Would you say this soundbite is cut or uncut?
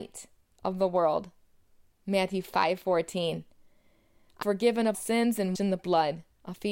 cut